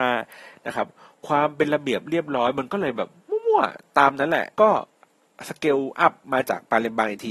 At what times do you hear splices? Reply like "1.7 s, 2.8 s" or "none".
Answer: 4.5 s